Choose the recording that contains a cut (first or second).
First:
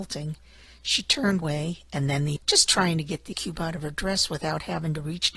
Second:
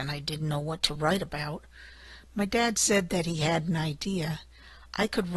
first